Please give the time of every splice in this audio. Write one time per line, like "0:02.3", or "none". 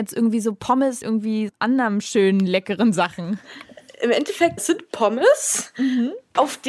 0:01.0
0:01.5
0:04.6